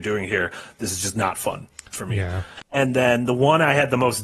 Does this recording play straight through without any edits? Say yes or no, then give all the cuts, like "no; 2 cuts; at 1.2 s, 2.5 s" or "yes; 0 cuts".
yes; 0 cuts